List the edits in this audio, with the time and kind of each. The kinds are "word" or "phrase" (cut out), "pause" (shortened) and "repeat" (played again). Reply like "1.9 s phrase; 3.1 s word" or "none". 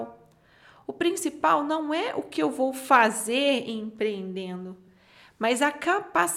none